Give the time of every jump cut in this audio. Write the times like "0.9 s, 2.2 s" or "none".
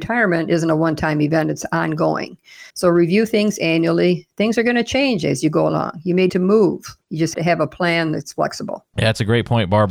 2.7 s, 6.3 s, 7.0 s, 7.3 s